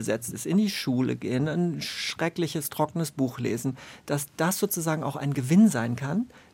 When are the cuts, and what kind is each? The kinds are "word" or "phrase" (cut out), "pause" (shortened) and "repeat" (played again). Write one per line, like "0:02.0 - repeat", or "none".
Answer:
none